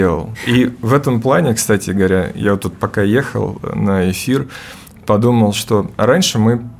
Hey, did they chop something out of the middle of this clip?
no; 0 cuts

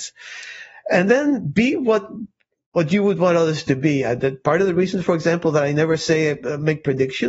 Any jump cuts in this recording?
no; 0 cuts

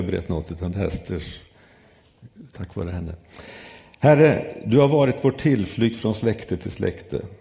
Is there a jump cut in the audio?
no; 0 cuts

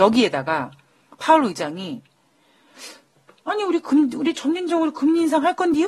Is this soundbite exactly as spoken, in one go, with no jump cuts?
yes; 0 cuts

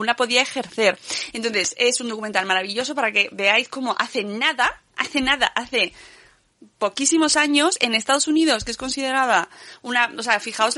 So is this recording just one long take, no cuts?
yes; 0 cuts

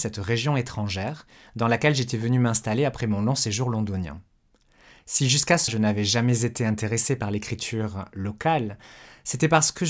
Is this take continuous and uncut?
no; 1 cut; at 5.7 s

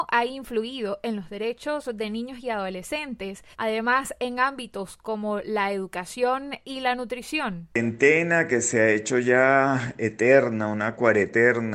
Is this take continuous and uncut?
no; 1 cut; at 3.5 s

